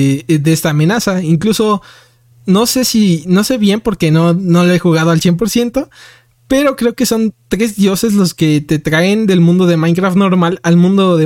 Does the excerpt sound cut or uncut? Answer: uncut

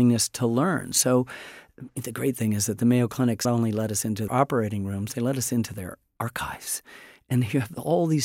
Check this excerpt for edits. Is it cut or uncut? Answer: cut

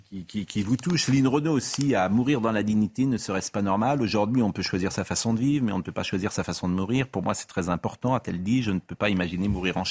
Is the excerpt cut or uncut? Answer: uncut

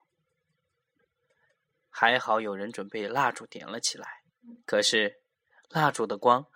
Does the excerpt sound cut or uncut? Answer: cut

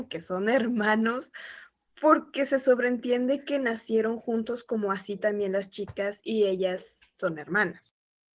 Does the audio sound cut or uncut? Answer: uncut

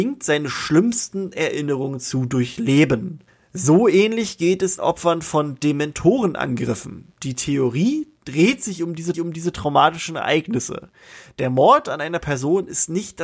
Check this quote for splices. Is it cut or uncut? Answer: cut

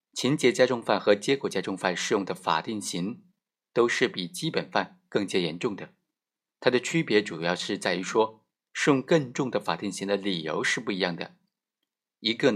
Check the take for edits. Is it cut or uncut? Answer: uncut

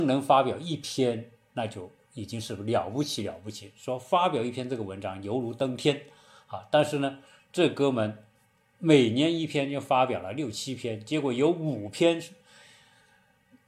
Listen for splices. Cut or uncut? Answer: uncut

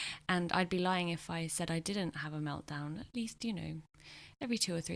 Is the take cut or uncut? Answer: uncut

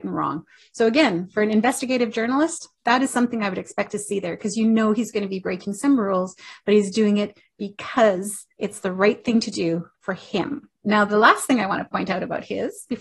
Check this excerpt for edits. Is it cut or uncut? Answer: cut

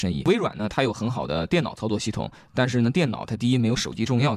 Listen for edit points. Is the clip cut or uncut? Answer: uncut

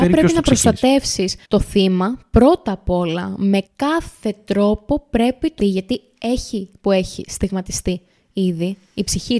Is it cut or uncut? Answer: cut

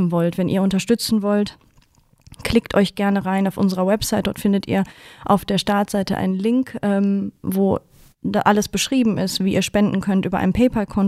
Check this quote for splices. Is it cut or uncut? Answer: uncut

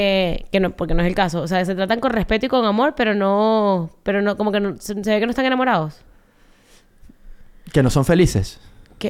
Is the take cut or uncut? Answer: uncut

